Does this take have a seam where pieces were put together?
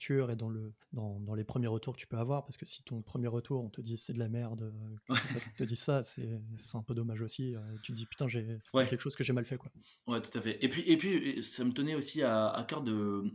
no; 0 cuts

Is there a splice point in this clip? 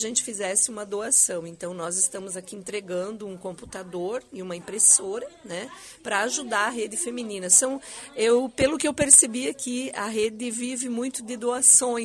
no; 0 cuts

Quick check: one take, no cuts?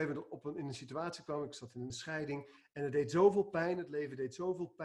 no; 1 cut; at 1.9 s

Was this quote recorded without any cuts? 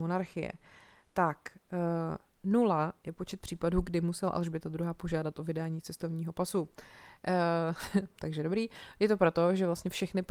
yes; 0 cuts

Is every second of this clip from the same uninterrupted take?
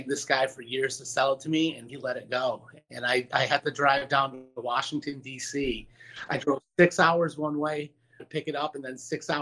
no; 2 cuts; at 1.9 s, 8.2 s

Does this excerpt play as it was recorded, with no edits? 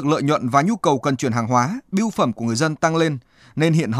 yes; 0 cuts

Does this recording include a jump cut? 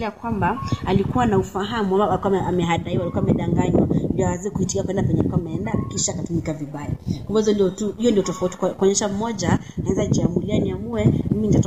no; 0 cuts

